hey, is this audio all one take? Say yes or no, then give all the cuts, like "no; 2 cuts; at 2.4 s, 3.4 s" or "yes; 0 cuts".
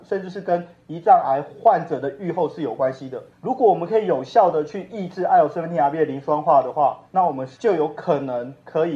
no; 3 cuts; at 3.3 s, 7.1 s, 7.5 s